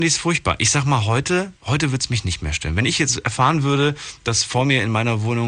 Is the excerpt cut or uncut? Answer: cut